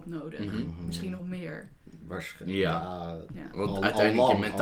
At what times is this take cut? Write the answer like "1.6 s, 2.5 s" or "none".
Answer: 1.2 s